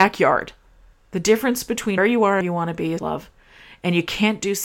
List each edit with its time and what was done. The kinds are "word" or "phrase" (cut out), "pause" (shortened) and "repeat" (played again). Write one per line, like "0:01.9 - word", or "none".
0:00.9 - pause
0:02.0 - word
0:02.4 - phrase
0:03.0 - word